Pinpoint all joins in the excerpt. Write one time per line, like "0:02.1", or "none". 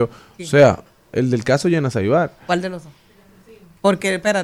none